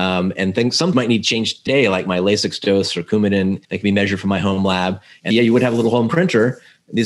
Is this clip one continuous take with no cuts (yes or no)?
no